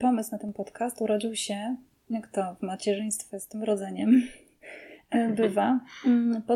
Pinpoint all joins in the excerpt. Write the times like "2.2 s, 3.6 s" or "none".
none